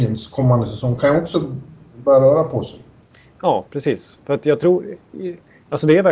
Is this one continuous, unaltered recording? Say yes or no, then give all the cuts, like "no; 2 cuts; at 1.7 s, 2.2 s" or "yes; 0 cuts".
yes; 0 cuts